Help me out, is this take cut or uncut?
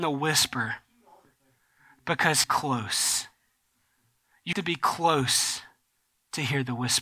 cut